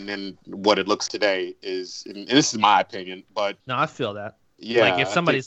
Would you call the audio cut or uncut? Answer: cut